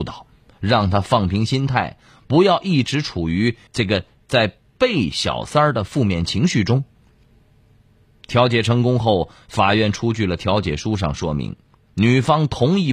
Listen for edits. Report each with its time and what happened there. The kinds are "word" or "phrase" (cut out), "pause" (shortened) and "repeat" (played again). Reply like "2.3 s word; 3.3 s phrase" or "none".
3.7 s pause